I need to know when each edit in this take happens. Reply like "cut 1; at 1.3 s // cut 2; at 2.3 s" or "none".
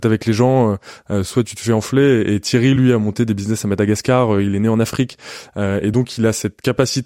none